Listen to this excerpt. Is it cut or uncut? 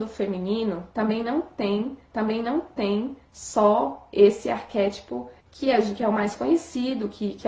cut